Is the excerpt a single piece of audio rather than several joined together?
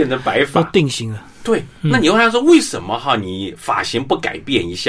yes; 0 cuts

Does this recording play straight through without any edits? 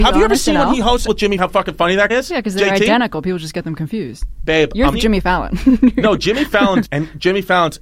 no; 5 cuts; at 1.1 s, 1.4 s, 2.1 s, 4.9 s, 6.8 s

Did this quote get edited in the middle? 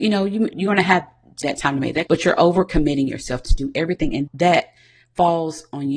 yes; 4 cuts; at 1.4 s, 2.1 s, 3.4 s, 4.3 s

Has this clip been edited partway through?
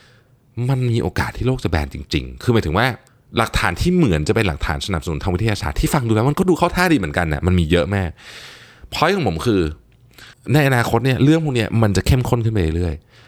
yes; 2 cuts; at 3.1 s, 10.3 s

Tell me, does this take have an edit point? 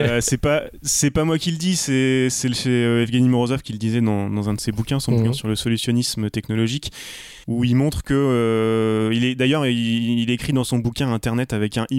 yes; 1 cut; at 7.4 s

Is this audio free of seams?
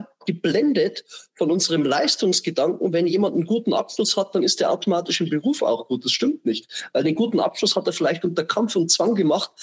yes; 0 cuts

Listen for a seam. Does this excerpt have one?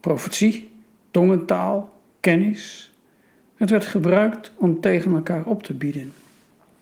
no; 0 cuts

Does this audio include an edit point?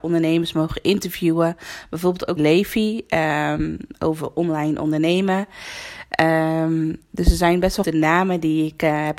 yes; 2 cuts; at 2.4 s, 7.8 s

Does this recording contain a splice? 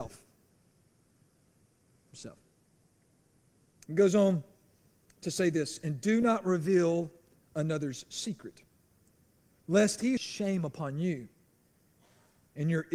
yes; 1 cut; at 10.2 s

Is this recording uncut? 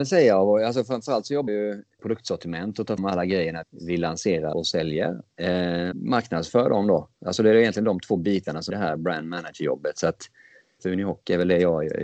no; 8 cuts; at 1.5 s, 2.0 s, 3.0 s, 3.6 s, 4.5 s, 5.9 s, 8.7 s, 10.8 s

